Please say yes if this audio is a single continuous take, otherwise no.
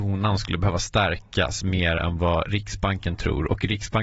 yes